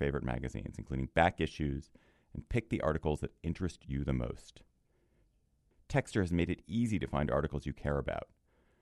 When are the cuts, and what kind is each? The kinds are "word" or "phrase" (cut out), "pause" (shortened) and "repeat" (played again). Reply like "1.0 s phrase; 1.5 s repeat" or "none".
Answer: none